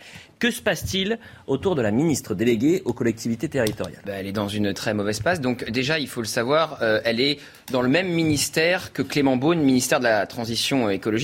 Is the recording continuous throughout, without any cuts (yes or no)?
no